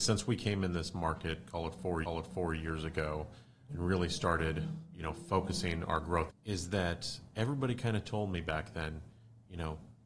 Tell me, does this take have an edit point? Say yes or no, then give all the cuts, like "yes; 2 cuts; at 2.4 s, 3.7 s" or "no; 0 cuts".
yes; 3 cuts; at 2.0 s, 3.7 s, 6.3 s